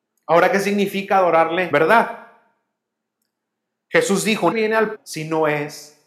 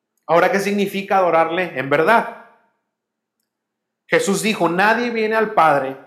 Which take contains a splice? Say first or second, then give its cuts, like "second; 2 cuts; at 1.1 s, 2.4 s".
first; 3 cuts; at 1.7 s, 4.5 s, 4.9 s